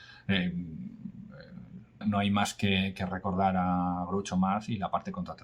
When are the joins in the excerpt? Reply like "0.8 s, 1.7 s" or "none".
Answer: 2.0 s